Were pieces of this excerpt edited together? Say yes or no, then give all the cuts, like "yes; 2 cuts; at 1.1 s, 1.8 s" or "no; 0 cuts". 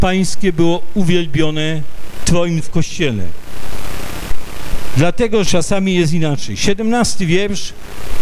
yes; 3 cuts; at 2.2 s, 2.6 s, 5.4 s